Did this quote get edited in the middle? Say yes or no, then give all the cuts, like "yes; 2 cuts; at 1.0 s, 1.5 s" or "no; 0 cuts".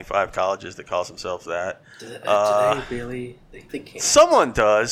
yes; 1 cut; at 3.7 s